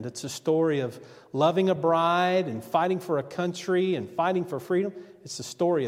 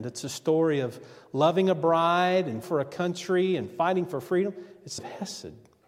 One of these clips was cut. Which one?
second; 2 cuts; at 2.6 s, 5.0 s

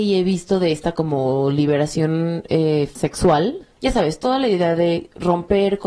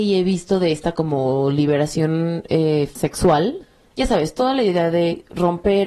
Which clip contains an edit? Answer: first; 1 cut; at 3.7 s

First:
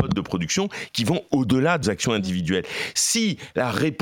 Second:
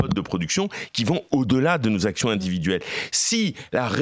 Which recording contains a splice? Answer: first; 1 cut; at 1.8 s

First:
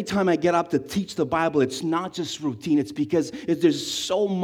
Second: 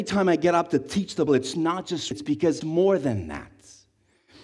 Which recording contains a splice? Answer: second; 3 cuts; at 1.3 s, 2.1 s, 2.6 s

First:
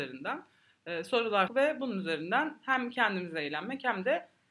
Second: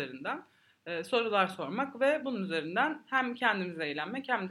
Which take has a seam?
first; 1 cut; at 1.5 s

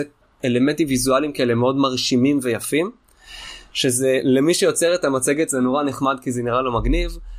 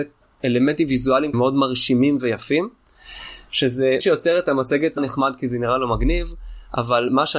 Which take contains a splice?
second; 3 cuts; at 1.3 s, 4.0 s, 5.0 s

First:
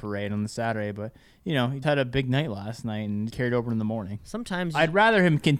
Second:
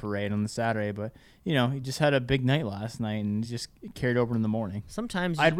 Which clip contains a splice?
first; 2 cuts; at 1.8 s, 3.3 s

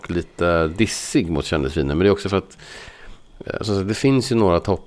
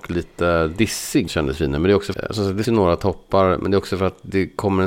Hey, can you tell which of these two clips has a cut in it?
second; 3 cuts; at 1.3 s, 2.1 s, 2.6 s

